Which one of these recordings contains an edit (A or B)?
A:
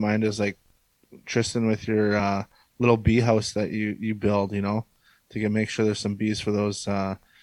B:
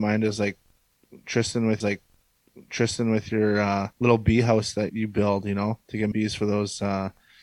B